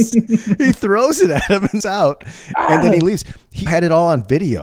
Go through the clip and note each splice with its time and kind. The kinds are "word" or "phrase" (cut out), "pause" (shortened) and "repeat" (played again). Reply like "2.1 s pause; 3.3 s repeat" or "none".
1.8 s phrase; 3.7 s word